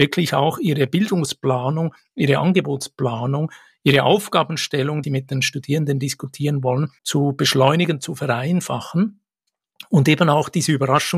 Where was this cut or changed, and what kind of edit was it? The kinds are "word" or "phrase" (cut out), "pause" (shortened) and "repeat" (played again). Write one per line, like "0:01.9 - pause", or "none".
0:05.0 - phrase
0:07.0 - pause